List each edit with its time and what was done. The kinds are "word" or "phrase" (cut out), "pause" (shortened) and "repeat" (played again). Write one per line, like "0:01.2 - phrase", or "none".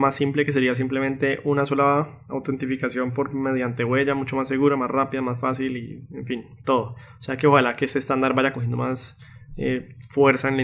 none

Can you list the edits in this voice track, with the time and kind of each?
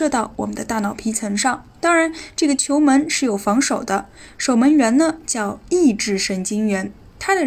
0:01.8 - pause

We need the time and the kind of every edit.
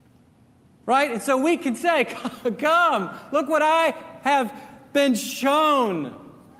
none

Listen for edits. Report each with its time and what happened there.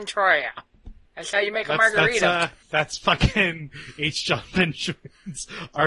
0:01.1 - pause
0:02.6 - pause

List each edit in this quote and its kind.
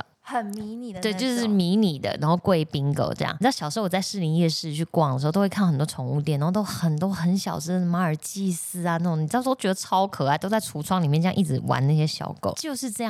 none

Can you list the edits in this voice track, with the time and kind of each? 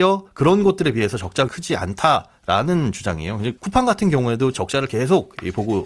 0:01.5 - word
0:03.6 - pause
0:04.5 - word

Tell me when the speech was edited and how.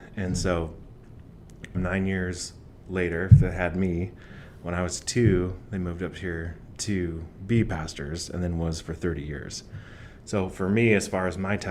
0:01.7 - word

